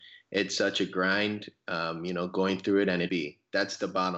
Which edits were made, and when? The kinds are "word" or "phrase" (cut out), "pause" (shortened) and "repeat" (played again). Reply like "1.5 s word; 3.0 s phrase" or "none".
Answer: 3.1 s word